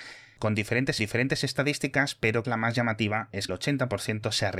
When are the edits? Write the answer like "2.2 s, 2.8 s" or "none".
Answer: 1.0 s, 2.4 s, 3.5 s